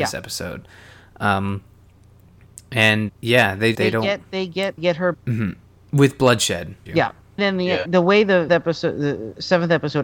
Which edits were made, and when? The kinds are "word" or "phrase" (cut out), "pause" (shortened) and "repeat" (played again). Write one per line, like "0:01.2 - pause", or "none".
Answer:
0:03.1 - word
0:03.7 - word
0:04.8 - word
0:05.1 - word
0:06.9 - word
0:07.4 - word
0:07.9 - word
0:08.5 - word

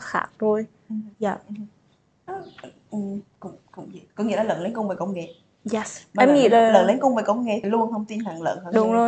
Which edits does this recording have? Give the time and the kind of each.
0:01.1 - pause
0:04.1 - pause
0:07.6 - phrase

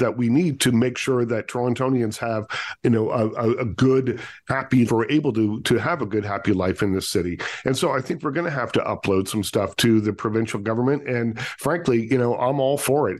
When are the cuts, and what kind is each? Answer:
0:02.8 - word
0:04.9 - word

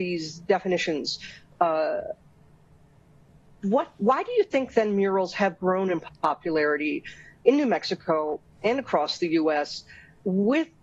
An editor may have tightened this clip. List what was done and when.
none

